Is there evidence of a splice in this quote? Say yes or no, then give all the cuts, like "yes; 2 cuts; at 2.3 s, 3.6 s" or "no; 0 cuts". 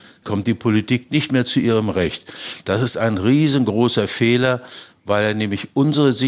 no; 0 cuts